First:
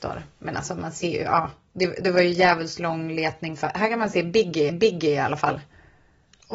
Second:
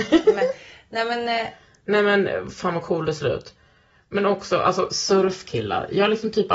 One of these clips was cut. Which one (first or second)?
first